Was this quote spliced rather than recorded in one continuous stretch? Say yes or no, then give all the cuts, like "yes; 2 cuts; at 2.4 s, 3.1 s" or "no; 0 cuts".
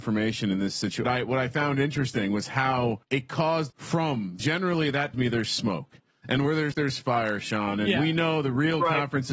yes; 6 cuts; at 1.0 s, 3.0 s, 3.7 s, 4.4 s, 5.1 s, 6.7 s